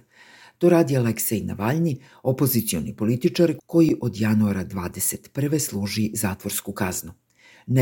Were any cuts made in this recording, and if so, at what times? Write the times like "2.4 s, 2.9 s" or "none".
none